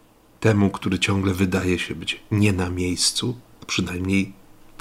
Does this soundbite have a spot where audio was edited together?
no; 0 cuts

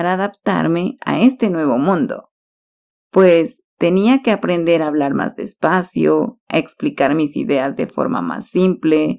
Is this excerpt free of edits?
yes; 0 cuts

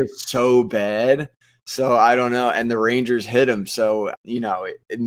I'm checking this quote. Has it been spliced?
yes; 1 cut; at 4.2 s

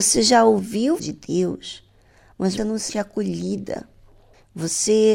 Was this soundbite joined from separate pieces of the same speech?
yes; 3 cuts; at 1.0 s, 2.6 s, 2.9 s

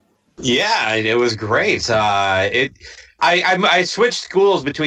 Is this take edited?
no; 0 cuts

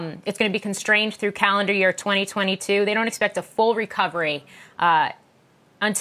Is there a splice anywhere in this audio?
no; 0 cuts

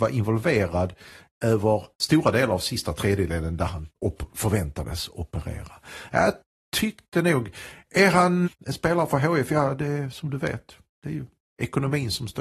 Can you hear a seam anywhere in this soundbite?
yes; 3 cuts; at 1.9 s, 4.0 s, 8.4 s

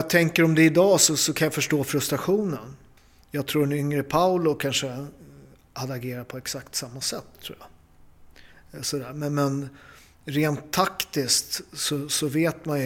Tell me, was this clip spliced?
no; 0 cuts

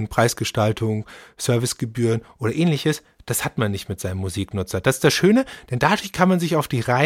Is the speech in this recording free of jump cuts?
yes; 0 cuts

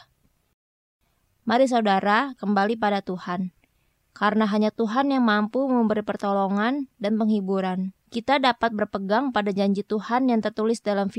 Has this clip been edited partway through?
yes; 2 cuts; at 2.4 s, 8.0 s

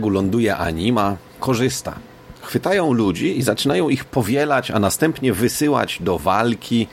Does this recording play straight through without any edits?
no; 1 cut; at 2.4 s

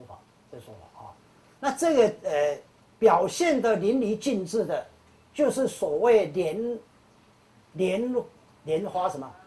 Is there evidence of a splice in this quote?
no; 0 cuts

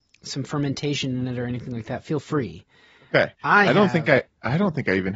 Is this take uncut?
yes; 0 cuts

